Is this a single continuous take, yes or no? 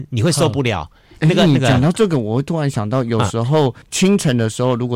no